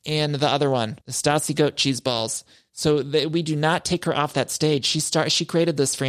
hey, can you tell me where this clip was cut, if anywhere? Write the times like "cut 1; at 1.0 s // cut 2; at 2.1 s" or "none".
cut 1; at 1.0 s